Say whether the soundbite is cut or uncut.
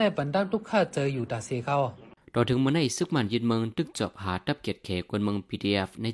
uncut